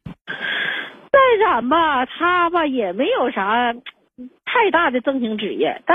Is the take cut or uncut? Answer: uncut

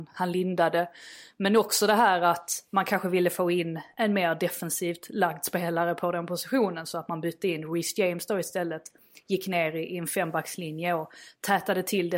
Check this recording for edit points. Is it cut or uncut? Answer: uncut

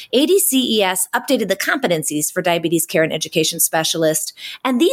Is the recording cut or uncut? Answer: uncut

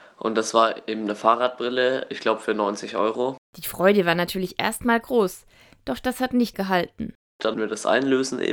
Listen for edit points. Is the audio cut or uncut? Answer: cut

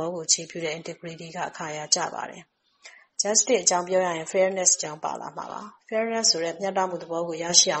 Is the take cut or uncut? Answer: uncut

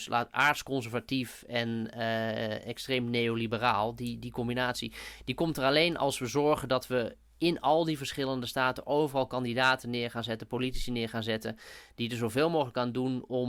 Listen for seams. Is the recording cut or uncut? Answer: uncut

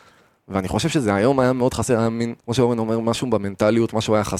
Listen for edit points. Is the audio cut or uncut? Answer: cut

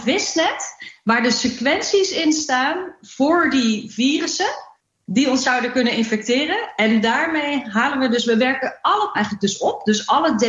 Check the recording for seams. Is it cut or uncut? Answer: cut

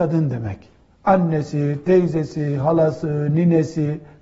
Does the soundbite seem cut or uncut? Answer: uncut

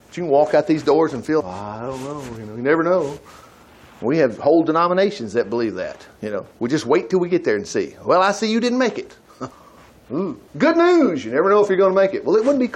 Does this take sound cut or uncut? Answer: cut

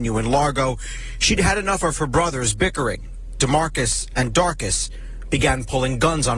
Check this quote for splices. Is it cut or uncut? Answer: uncut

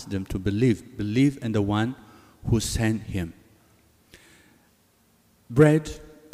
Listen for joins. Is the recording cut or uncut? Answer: uncut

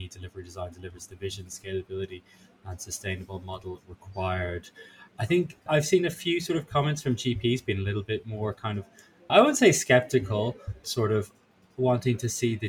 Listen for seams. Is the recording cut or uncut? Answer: cut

